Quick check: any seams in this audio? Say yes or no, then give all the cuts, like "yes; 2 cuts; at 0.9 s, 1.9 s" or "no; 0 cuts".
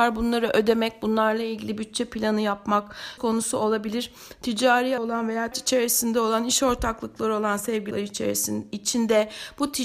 yes; 4 cuts; at 3.2 s, 5.0 s, 5.5 s, 7.9 s